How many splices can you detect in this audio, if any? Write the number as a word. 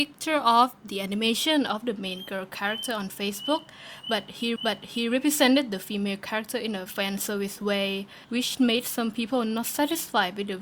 three